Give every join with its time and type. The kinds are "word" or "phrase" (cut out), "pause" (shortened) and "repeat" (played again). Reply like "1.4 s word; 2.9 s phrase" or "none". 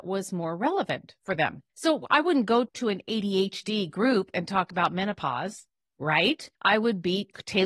1.7 s pause; 6.5 s pause

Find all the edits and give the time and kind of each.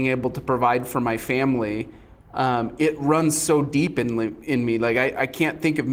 none

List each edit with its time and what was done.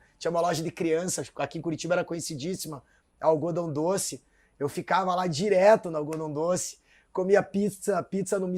none

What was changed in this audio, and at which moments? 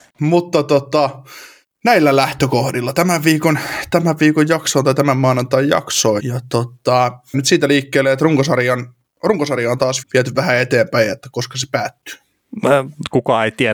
6.2 s word; 7.3 s word; 10.0 s word

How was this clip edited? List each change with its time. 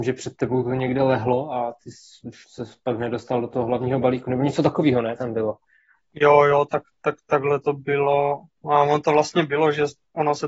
2.4 s pause

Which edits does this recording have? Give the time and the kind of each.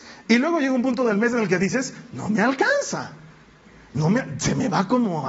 none

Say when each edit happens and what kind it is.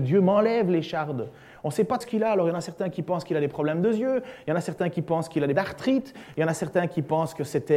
2.0 s word; 5.5 s word

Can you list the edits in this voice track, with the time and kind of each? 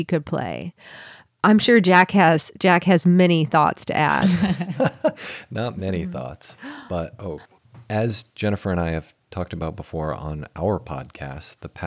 none

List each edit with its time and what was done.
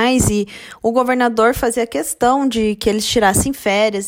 none

